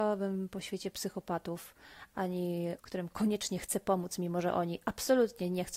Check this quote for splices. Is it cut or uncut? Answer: cut